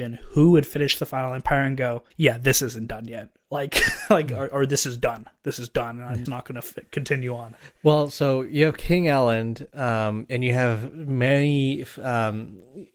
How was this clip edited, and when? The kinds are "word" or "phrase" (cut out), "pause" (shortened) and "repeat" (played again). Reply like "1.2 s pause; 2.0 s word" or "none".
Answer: 2.1 s pause; 6.3 s word